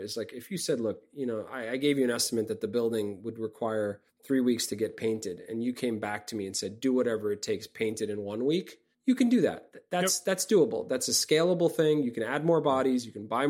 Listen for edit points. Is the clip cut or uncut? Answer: uncut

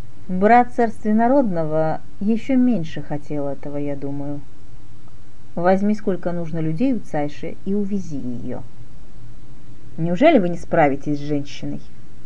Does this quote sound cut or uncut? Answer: uncut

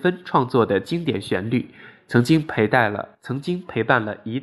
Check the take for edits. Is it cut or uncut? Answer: cut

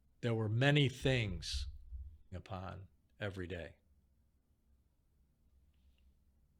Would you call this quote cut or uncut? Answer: cut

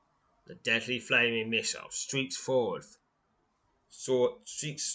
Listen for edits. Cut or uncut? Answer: uncut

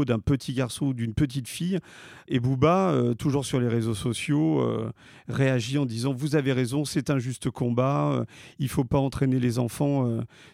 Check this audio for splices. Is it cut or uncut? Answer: uncut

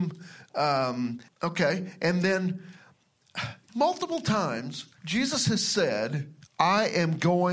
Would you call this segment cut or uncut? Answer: cut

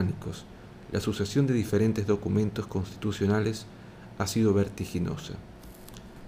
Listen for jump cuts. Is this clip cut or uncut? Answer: uncut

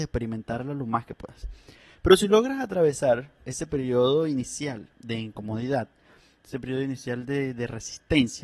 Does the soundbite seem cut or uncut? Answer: uncut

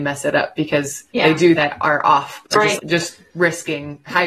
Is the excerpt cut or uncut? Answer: cut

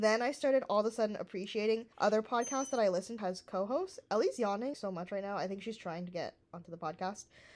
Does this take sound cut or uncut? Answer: cut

